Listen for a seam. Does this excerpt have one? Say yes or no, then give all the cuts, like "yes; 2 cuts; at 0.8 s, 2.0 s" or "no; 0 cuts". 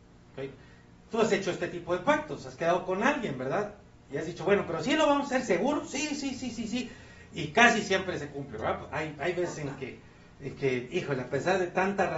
no; 0 cuts